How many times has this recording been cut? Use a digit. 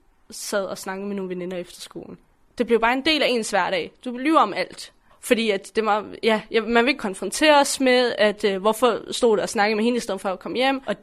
1